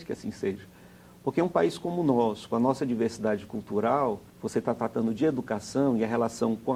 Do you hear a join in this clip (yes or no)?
yes